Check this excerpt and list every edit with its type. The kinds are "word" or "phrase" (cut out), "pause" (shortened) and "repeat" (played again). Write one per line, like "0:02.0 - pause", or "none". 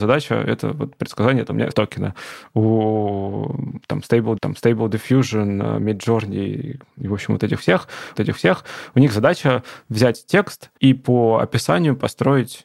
0:01.7 - word
0:04.4 - repeat
0:08.2 - repeat
0:10.8 - pause